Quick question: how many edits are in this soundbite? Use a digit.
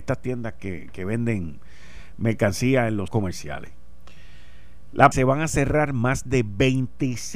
2